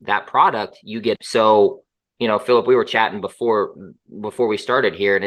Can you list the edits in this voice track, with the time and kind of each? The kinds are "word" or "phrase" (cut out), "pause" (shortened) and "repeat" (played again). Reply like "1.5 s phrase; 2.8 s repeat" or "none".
1.1 s phrase